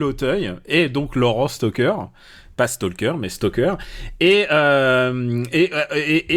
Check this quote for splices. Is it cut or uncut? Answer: uncut